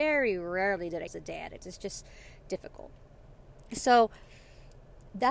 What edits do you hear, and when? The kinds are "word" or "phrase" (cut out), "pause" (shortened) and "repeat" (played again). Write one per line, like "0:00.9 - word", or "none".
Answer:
0:01.1 - word
0:01.6 - word